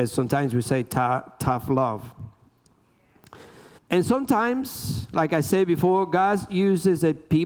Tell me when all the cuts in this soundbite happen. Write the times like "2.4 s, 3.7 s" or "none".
3.8 s